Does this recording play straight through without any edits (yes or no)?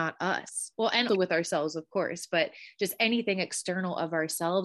no